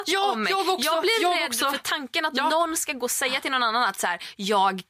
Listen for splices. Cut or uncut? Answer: uncut